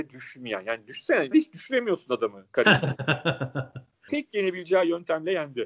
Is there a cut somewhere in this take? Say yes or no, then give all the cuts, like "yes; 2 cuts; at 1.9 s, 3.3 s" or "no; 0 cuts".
yes; 2 cuts; at 1.3 s, 4.1 s